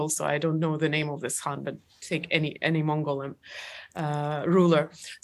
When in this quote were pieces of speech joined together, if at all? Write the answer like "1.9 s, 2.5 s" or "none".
none